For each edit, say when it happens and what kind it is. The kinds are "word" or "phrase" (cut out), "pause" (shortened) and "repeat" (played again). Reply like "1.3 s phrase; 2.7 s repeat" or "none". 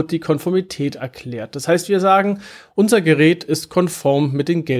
none